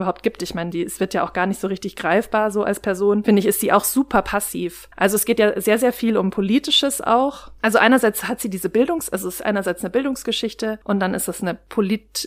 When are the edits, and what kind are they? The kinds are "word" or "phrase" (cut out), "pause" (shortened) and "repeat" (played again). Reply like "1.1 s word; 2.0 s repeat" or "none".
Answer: 4.9 s pause; 10.8 s pause